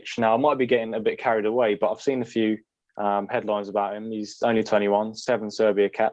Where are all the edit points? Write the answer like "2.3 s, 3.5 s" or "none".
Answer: none

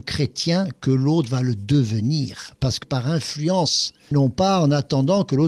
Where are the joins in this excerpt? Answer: 2.8 s, 4.1 s

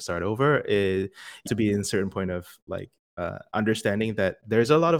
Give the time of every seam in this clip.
1.5 s

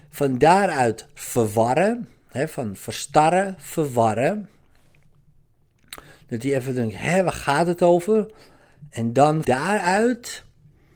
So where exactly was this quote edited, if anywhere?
9.4 s

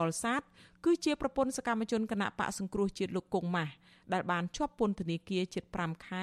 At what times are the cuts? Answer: none

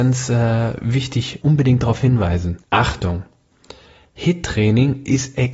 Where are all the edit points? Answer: 1.4 s, 2.6 s

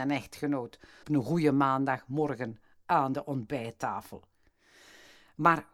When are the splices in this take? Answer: 1.0 s

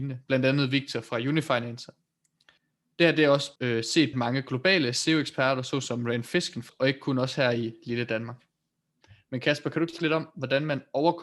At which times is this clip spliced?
3.6 s, 4.1 s, 6.7 s, 10.0 s

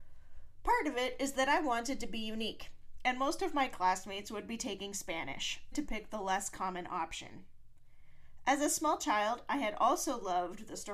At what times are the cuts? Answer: 5.7 s

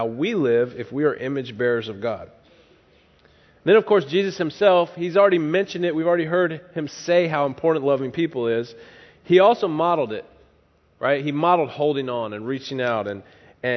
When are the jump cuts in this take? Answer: none

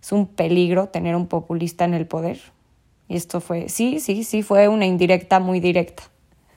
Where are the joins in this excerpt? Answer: none

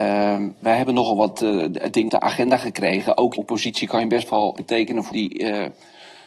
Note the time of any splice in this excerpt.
2.1 s, 3.4 s, 4.6 s, 5.1 s

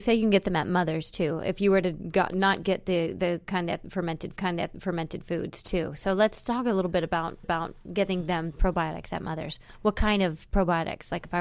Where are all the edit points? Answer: 4.3 s, 7.4 s

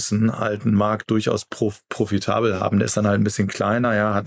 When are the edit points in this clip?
none

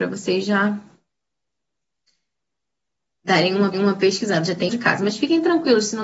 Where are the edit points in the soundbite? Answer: 3.7 s, 4.7 s

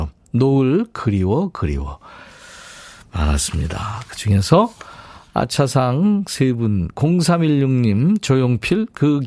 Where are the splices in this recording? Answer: none

